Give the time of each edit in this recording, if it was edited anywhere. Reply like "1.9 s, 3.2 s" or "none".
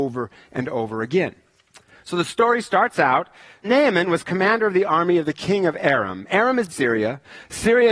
3.6 s, 6.7 s